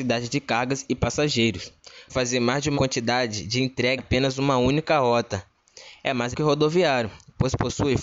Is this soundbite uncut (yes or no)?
no